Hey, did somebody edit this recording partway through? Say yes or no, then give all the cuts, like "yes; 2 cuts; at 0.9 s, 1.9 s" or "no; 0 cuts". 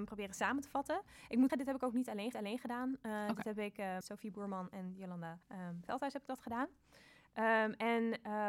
yes; 4 cuts; at 1.5 s, 2.3 s, 4.0 s, 5.4 s